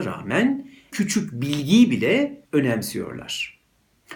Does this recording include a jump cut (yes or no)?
yes